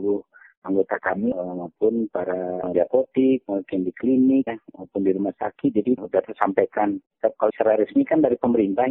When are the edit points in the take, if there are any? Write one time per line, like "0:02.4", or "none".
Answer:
0:02.7
0:04.5
0:07.5